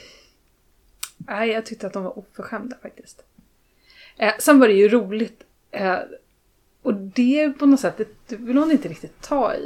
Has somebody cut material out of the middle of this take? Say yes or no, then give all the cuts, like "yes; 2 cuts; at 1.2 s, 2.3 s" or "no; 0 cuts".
no; 0 cuts